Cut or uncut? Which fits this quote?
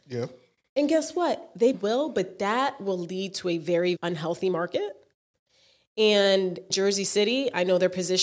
cut